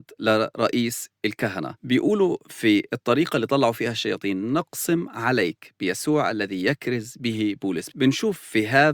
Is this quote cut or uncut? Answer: cut